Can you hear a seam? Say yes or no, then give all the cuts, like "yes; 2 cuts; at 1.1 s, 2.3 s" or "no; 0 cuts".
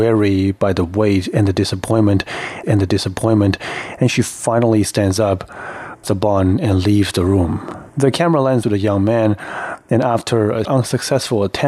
yes; 5 cuts; at 2.6 s, 6.0 s, 7.9 s, 8.6 s, 10.7 s